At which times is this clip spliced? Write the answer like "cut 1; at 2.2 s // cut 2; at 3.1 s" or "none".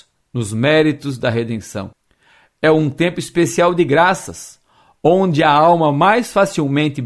none